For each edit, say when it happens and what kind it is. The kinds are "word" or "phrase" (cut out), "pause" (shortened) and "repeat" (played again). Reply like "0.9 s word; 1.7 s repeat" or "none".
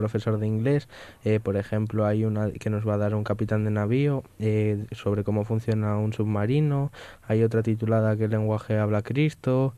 none